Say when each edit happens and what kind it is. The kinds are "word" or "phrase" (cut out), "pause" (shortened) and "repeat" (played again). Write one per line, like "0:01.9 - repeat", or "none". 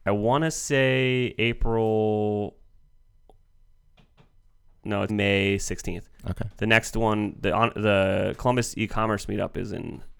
0:05.1 - word